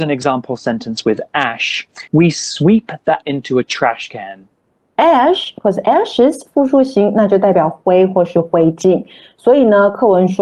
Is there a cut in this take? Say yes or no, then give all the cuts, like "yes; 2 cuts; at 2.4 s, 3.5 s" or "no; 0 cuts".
yes; 3 cuts; at 2.1 s, 3.2 s, 4.6 s